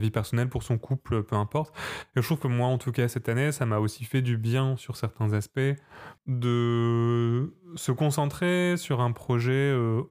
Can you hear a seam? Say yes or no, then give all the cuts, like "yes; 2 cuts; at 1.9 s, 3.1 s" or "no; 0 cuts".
yes; 1 cut; at 6.2 s